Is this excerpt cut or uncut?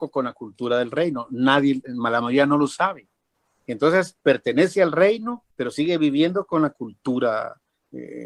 cut